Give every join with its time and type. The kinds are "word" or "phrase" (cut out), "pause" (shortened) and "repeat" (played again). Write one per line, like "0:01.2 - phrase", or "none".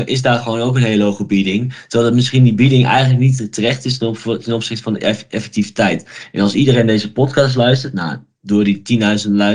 none